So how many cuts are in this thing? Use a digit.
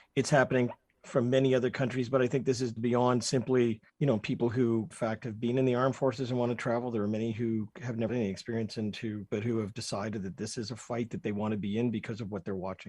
5